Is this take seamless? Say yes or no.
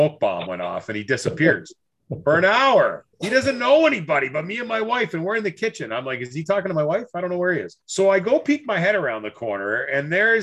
no